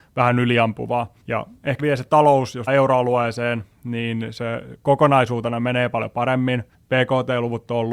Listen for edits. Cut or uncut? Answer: cut